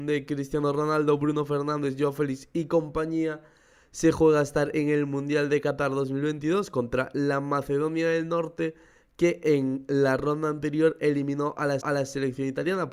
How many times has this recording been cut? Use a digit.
1